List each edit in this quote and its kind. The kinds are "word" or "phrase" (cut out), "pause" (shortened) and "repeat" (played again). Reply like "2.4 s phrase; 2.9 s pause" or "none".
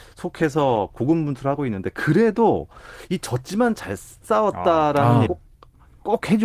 5.3 s word

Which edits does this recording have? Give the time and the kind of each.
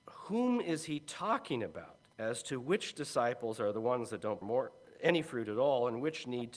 2.1 s pause; 4.4 s word

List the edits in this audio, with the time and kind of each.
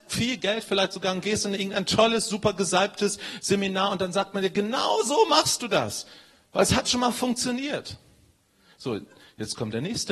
none

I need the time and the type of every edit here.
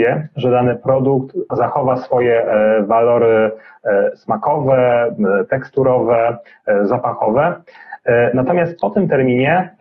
1.5 s word

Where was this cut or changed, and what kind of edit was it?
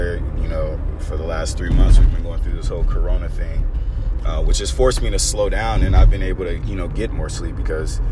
none

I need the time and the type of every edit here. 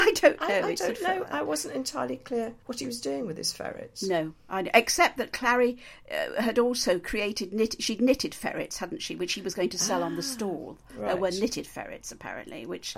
2.6 s pause

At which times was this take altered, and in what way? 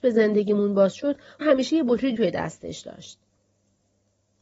1.4 s word; 2.2 s word

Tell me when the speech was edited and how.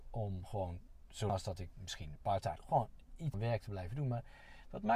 1.3 s word; 1.7 s word; 2.2 s word; 2.6 s word; 3.3 s word

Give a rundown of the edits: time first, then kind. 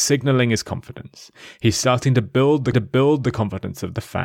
2.7 s repeat

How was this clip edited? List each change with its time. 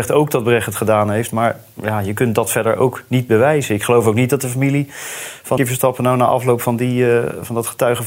5.6 s word

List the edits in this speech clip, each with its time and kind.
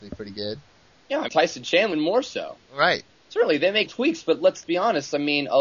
1.3 s word; 1.9 s word; 3.9 s word; 4.6 s word

